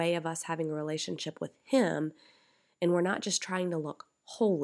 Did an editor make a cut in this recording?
no; 0 cuts

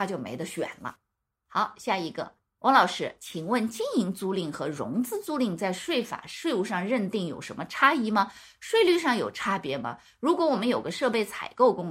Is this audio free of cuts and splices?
yes; 0 cuts

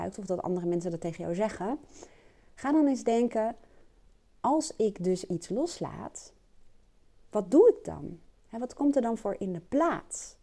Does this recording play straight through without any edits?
yes; 0 cuts

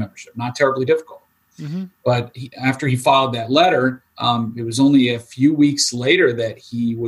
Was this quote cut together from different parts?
yes; 2 cuts; at 1.9 s, 4.1 s

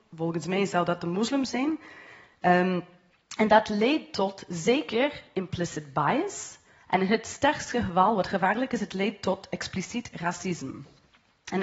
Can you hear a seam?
no; 0 cuts

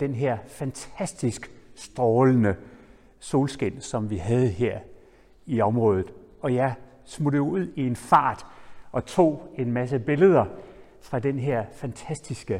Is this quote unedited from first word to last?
yes; 0 cuts

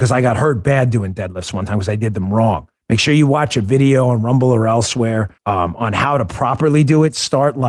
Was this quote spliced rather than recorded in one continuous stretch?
yes; 2 cuts; at 2.8 s, 5.4 s

